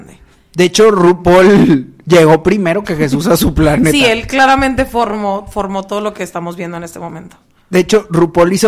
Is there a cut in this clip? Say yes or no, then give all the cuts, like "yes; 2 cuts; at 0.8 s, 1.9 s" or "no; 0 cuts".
no; 0 cuts